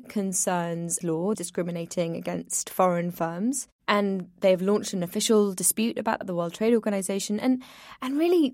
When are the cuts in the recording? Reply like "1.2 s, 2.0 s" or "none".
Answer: 1.0 s, 1.3 s, 6.2 s